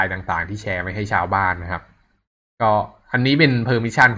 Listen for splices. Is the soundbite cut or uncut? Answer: uncut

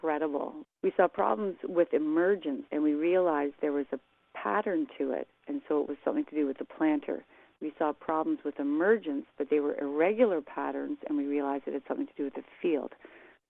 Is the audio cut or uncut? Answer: cut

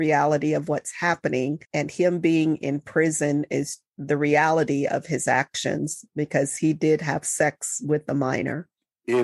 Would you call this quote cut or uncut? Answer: cut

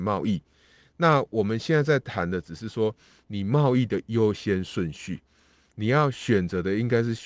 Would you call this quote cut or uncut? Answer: uncut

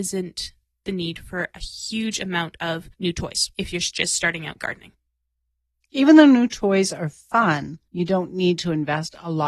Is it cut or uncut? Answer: cut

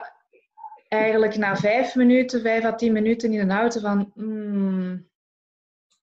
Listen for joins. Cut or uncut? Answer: uncut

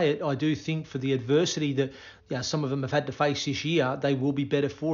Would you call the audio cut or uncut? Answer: cut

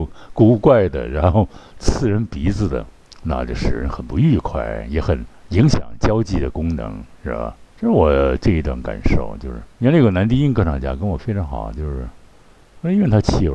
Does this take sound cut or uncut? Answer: cut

